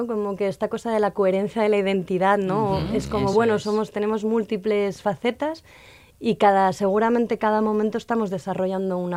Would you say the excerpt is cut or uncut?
uncut